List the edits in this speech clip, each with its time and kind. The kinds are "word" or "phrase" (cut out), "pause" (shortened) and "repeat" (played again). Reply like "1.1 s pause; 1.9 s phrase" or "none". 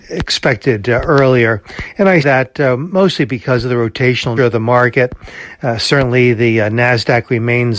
2.2 s word; 4.4 s word